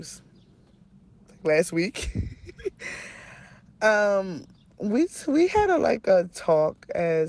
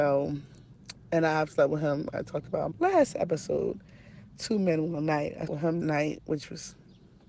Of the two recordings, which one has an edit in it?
second; 3 cuts; at 2.7 s, 5.5 s, 5.8 s

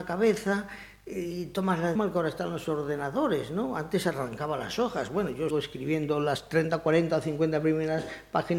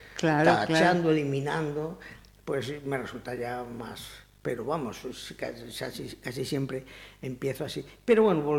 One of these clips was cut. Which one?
first; 2 cuts; at 2.0 s, 5.5 s

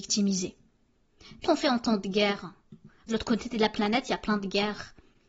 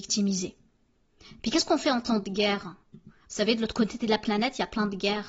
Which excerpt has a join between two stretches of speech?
first; 2 cuts; at 1.4 s, 3.1 s

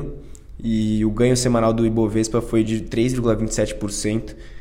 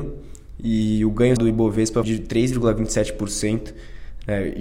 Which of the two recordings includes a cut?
second; 2 cuts; at 1.4 s, 2.0 s

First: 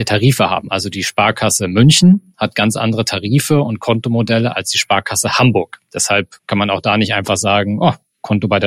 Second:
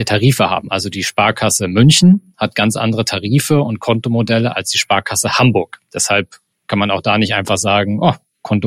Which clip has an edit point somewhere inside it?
first; 1 cut; at 6.4 s

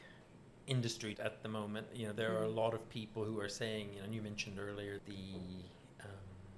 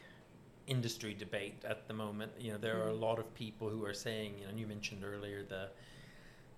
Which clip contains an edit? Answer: first; 2 cuts; at 1.1 s, 5.0 s

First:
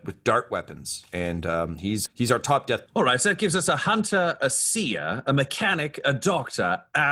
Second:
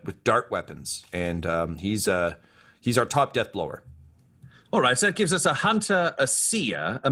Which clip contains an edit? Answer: first; 2 cuts; at 2.1 s, 2.9 s

